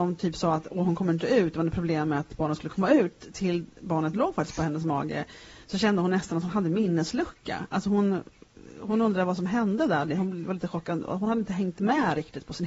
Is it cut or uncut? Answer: uncut